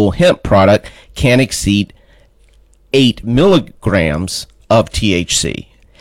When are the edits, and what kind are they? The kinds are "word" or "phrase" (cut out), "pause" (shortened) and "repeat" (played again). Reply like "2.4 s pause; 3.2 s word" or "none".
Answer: none